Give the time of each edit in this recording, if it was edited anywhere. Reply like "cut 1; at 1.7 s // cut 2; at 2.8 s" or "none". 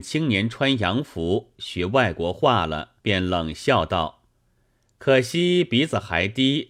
cut 1; at 3.0 s